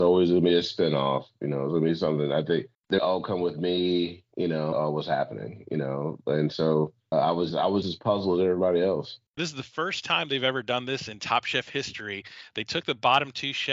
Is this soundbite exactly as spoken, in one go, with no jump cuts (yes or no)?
no